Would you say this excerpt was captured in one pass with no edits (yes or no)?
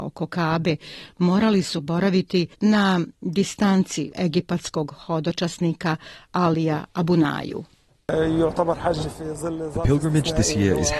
no